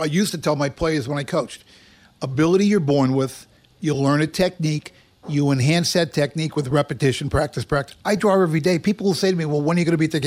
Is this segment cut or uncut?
uncut